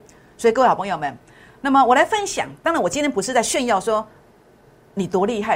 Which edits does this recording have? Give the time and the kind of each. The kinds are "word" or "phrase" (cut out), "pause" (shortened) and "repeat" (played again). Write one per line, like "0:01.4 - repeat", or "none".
none